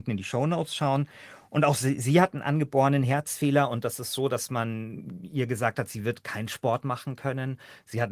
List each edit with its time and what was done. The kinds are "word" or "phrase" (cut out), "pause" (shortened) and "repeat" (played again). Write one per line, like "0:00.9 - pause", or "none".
none